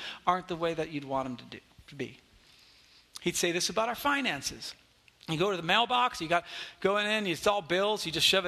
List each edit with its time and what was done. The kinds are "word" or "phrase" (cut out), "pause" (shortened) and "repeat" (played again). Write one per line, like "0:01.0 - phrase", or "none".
none